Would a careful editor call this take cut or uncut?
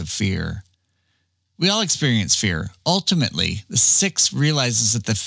uncut